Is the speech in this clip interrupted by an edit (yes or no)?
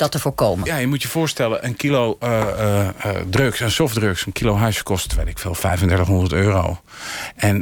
no